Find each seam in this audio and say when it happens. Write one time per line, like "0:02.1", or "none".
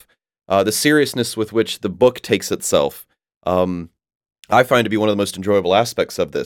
none